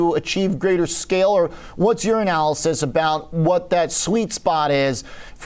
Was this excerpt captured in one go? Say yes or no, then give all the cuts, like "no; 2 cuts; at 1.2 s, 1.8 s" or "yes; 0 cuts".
yes; 0 cuts